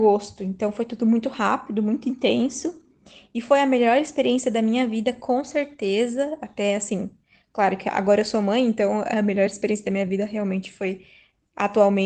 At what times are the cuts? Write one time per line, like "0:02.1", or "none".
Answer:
none